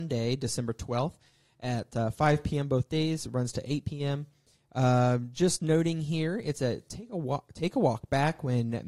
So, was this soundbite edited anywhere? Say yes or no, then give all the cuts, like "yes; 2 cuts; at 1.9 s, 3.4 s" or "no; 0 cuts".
no; 0 cuts